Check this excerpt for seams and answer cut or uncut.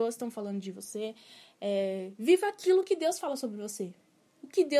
uncut